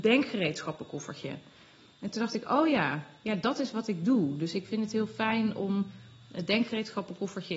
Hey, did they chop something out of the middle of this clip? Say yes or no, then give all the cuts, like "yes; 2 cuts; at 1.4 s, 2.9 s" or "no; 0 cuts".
no; 0 cuts